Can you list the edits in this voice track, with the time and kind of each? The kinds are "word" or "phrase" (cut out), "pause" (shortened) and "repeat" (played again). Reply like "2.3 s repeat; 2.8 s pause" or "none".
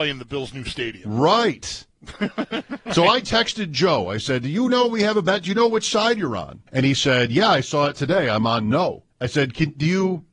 6.7 s pause; 9.1 s pause

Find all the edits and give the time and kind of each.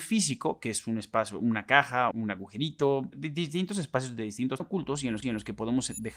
2.1 s word; 3.1 s word; 4.6 s phrase; 5.2 s repeat

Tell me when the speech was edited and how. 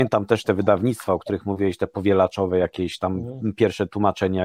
none

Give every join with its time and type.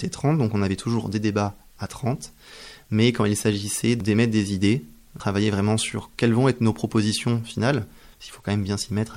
none

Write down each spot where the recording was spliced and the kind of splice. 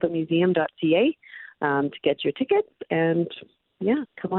none

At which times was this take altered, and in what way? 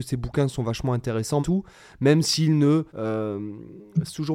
1.4 s word; 2.9 s pause

